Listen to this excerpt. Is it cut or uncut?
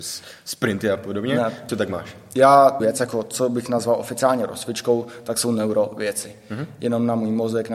cut